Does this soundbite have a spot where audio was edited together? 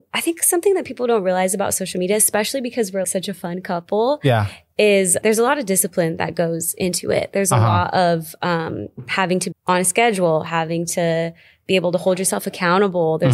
yes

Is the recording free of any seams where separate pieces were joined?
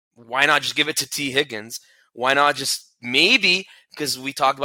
yes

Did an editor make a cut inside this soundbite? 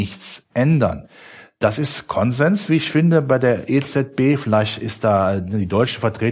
no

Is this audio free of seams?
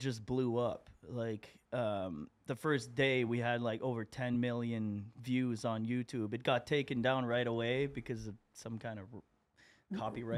yes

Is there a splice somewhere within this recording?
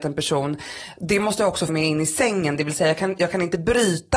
yes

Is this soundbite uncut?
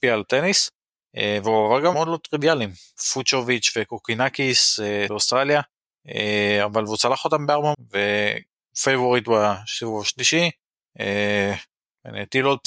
no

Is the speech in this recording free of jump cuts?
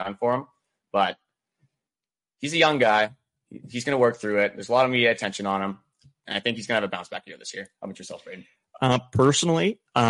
yes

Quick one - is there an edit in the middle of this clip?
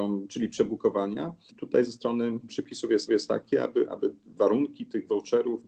yes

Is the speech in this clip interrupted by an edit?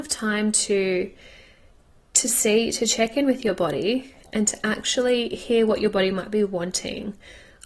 no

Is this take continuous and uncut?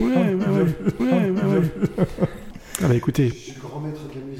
no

